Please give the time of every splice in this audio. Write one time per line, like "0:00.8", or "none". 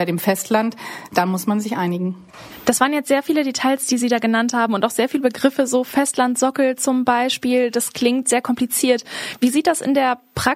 none